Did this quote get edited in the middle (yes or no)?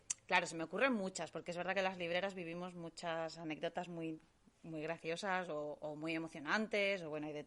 no